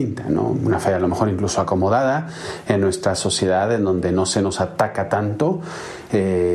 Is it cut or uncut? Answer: uncut